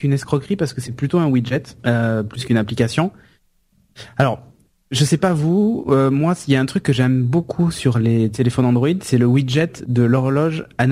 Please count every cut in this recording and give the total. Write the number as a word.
one